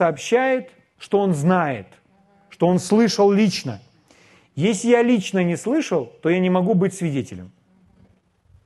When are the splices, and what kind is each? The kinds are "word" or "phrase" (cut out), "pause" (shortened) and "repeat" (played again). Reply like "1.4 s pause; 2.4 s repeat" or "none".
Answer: none

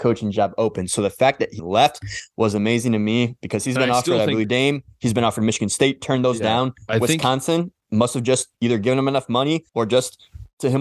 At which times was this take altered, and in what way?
1.6 s word; 4.4 s word; 8.5 s pause; 9.7 s pause

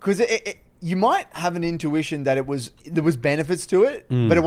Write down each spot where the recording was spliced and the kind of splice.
2.8 s pause

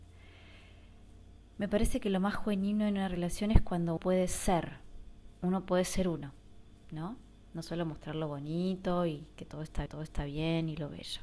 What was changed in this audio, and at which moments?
4.0 s word; 6.8 s word; 9.9 s repeat

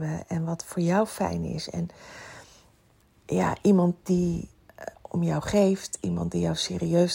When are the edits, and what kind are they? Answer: none

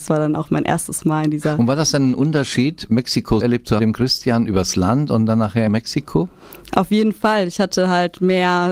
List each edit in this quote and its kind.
3.4 s word; 3.8 s phrase; 5.7 s phrase

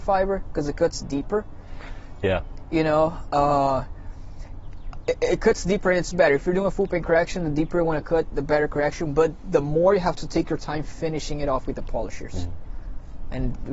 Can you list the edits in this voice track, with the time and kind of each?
none

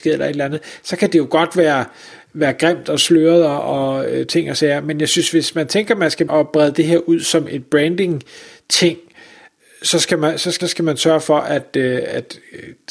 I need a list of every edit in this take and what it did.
6.3 s word; 10.6 s repeat

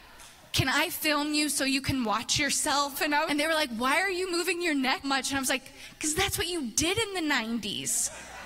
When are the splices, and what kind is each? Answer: 3.3 s phrase; 5.0 s word

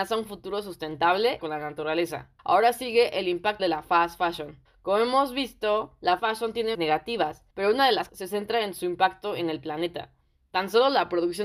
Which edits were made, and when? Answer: 1.4 s phrase; 2.4 s pause; 3.6 s word; 4.7 s pause; 6.2 s word; 6.7 s word; 7.5 s pause; 8.1 s phrase

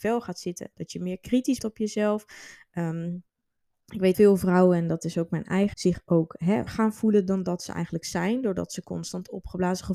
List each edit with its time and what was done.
1.6 s word; 4.1 s word; 5.7 s word; 6.7 s word

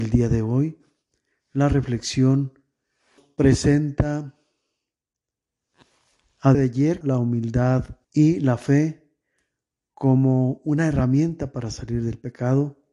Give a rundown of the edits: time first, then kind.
3.2 s word; 6.5 s word; 7.0 s phrase; 8.0 s pause

